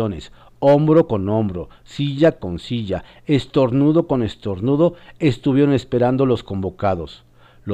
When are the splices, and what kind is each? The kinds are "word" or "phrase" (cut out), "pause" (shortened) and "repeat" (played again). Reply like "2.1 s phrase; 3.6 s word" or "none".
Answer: none